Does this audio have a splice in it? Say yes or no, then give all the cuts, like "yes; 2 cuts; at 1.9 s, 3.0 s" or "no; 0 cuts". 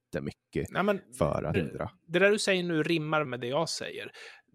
yes; 2 cuts; at 1.5 s, 3.3 s